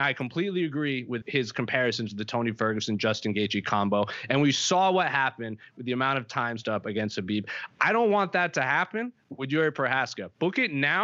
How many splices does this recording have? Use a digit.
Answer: 2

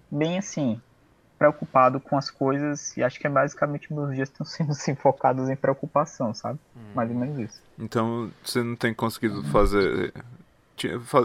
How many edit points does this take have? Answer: 0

